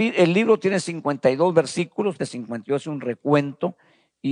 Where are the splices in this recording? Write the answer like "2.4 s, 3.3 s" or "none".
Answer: 2.2 s